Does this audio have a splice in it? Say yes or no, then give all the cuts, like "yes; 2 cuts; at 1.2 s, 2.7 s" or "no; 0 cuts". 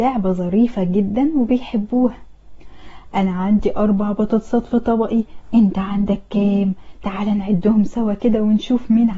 no; 0 cuts